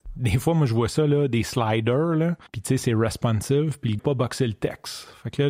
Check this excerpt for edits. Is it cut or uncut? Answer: cut